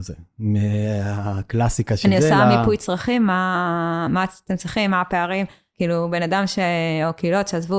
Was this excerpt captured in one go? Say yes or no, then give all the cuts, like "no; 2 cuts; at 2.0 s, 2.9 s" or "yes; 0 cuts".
yes; 0 cuts